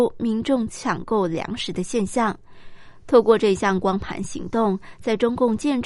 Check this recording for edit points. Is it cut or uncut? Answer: uncut